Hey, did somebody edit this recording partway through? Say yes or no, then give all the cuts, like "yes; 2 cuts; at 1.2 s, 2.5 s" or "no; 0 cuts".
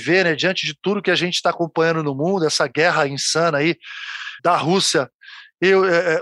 yes; 1 cut; at 4.4 s